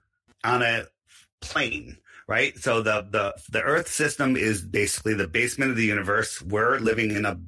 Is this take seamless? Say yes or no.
yes